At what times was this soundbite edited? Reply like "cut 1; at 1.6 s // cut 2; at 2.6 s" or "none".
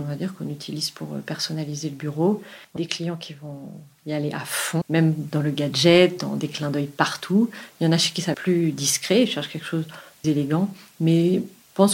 cut 1; at 2.8 s // cut 2; at 4.8 s // cut 3; at 8.3 s // cut 4; at 10.2 s